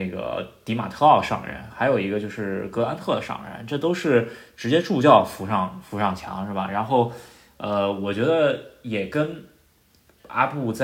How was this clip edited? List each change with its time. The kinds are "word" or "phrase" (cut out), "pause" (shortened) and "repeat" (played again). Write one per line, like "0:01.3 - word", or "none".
none